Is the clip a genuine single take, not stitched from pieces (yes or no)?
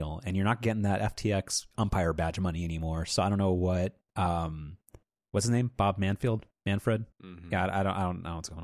no